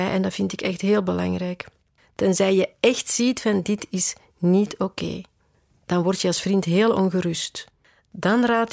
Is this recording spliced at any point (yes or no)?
no